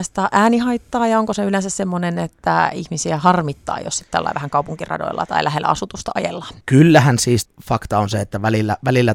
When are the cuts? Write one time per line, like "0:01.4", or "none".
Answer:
0:06.6
0:07.4